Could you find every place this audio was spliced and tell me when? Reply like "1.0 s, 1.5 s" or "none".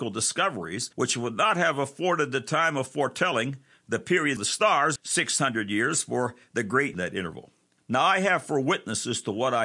0.9 s, 4.4 s, 5.0 s, 6.9 s